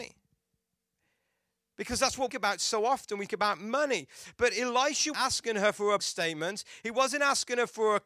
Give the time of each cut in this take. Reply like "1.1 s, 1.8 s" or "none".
2.3 s, 3.3 s, 5.1 s, 6.0 s